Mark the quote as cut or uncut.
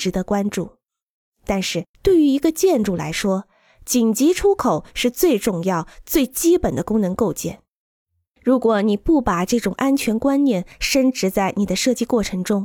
cut